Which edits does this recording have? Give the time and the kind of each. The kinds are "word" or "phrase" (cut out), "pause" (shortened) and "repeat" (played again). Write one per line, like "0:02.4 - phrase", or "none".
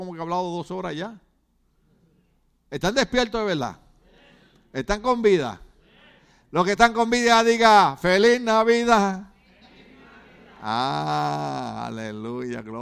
none